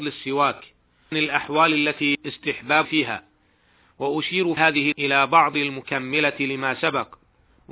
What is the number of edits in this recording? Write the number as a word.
six